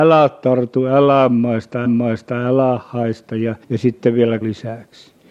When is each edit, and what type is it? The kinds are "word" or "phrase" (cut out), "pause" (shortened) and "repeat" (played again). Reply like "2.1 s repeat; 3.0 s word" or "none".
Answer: 1.8 s repeat; 3.6 s pause; 4.4 s phrase